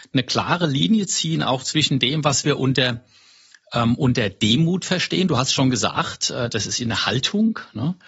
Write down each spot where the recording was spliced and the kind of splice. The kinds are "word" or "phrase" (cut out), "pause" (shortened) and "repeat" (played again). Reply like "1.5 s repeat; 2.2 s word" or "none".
none